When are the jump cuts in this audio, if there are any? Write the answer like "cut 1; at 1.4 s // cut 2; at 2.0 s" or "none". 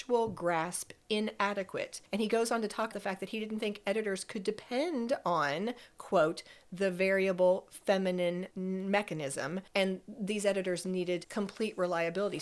cut 1; at 2.9 s